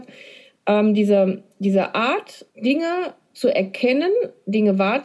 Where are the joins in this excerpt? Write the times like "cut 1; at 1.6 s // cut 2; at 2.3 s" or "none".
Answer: cut 1; at 2.5 s